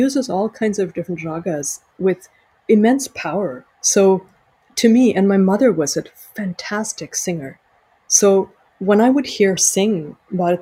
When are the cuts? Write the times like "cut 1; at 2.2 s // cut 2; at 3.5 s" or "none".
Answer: cut 1; at 3.7 s // cut 2; at 9.6 s